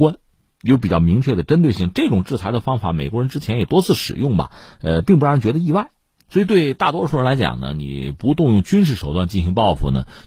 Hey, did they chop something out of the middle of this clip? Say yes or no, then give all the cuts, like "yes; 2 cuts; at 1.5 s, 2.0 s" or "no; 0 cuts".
no; 0 cuts